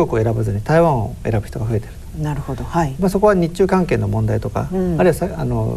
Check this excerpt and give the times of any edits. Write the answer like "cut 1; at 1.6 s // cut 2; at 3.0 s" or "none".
cut 1; at 3.0 s